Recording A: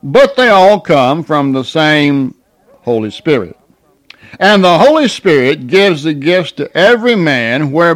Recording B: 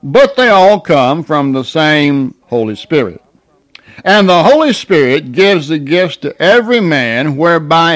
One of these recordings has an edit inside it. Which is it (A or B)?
B